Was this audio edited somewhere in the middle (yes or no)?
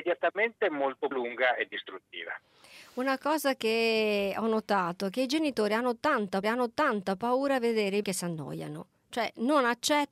yes